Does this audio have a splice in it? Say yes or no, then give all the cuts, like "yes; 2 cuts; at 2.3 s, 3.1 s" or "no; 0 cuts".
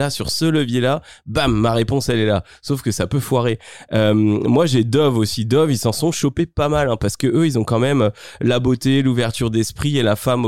no; 0 cuts